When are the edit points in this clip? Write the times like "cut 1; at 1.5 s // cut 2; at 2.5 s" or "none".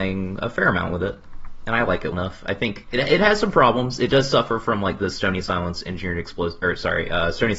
cut 1; at 2.1 s